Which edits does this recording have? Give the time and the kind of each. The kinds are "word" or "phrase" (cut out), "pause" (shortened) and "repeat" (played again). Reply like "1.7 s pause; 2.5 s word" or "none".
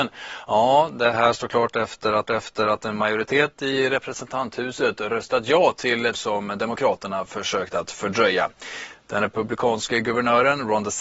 2.3 s repeat; 6.1 s word